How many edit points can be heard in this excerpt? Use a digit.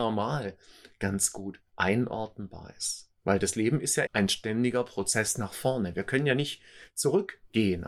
3